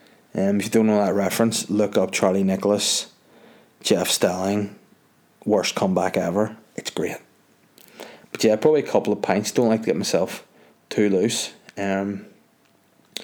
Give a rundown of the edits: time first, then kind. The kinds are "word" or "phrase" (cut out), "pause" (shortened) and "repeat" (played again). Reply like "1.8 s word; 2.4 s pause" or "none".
none